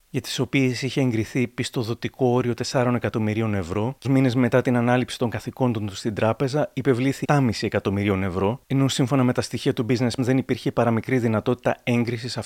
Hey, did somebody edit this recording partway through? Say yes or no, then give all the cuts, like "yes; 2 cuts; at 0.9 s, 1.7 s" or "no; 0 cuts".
yes; 3 cuts; at 4.0 s, 7.2 s, 10.2 s